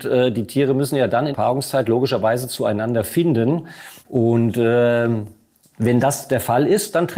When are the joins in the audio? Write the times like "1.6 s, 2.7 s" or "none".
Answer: 1.3 s, 4.0 s